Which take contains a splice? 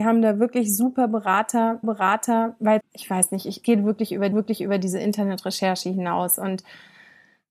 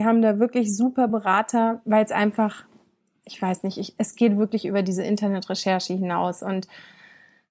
first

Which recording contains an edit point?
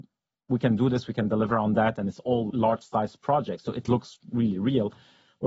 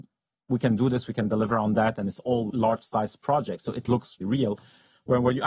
second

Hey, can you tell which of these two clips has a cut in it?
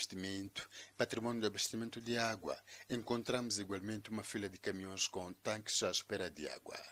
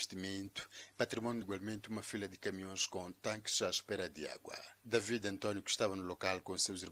second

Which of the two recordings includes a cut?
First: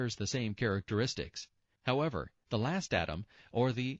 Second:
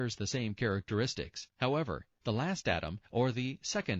second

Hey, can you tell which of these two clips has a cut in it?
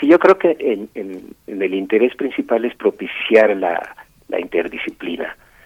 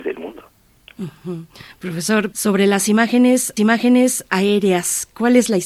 second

